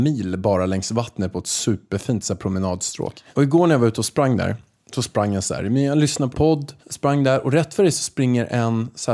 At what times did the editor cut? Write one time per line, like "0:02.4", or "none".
0:03.3
0:06.3
0:06.8